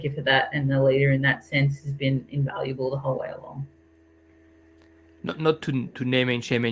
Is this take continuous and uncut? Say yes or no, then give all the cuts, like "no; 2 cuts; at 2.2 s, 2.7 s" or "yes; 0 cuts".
yes; 0 cuts